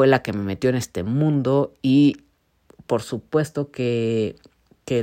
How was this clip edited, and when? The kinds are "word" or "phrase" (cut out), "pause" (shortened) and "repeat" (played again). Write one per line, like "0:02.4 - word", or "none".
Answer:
none